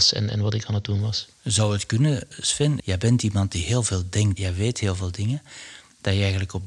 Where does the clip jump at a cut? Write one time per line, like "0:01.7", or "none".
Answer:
0:01.3
0:04.4